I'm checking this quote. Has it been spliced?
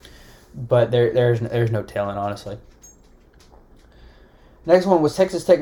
no; 0 cuts

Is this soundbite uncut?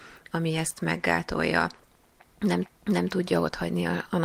no; 1 cut; at 2.6 s

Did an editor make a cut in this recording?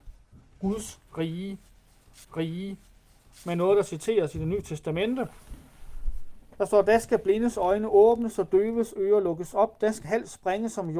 yes; 2 cuts; at 2.2 s, 10.0 s

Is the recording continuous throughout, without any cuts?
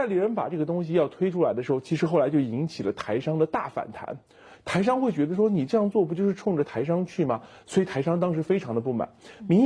yes; 0 cuts

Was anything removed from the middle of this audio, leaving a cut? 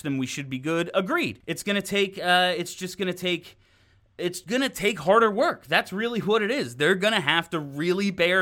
yes; 1 cut; at 4.4 s

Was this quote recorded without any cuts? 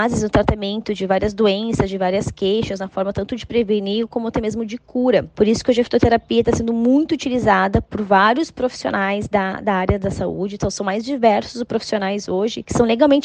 yes; 0 cuts

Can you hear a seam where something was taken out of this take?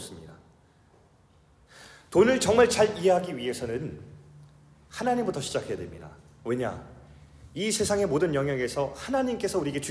no; 0 cuts

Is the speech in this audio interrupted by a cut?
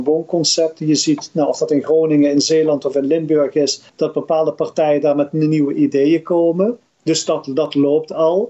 yes; 1 cut; at 3.9 s

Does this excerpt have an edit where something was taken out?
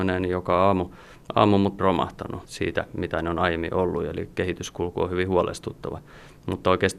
yes; 1 cut; at 1.8 s

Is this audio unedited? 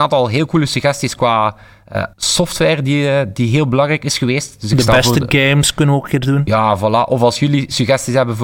no; 1 cut; at 2.1 s

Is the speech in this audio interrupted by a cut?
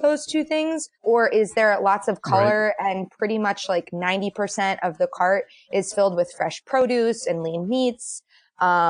yes; 1 cut; at 0.9 s

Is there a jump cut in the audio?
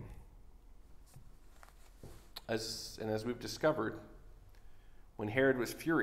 no; 0 cuts

